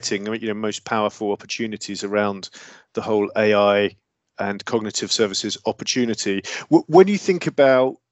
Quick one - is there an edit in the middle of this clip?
no; 0 cuts

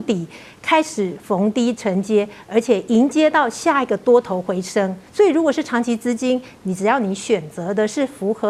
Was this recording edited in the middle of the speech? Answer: yes; 1 cut; at 5.1 s

